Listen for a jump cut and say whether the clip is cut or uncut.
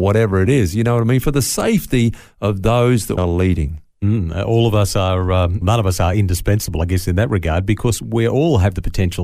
cut